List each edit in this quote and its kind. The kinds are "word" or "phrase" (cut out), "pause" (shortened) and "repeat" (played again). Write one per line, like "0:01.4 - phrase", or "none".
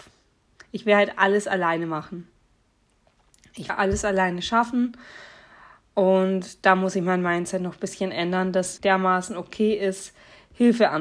0:03.7 - word
0:08.8 - word